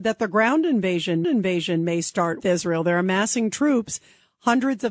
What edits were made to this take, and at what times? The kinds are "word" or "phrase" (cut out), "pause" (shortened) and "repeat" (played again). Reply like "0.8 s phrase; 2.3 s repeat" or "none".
1.2 s repeat; 2.4 s word